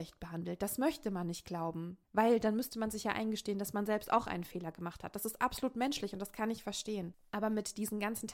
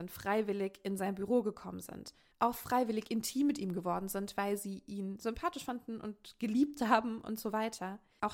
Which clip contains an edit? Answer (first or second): first